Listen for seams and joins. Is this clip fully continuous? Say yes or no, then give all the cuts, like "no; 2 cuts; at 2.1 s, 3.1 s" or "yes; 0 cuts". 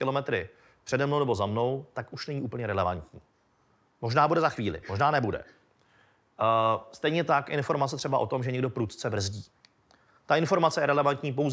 yes; 0 cuts